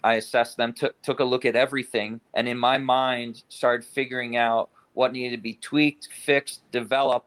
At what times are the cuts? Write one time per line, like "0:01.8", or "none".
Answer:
0:02.3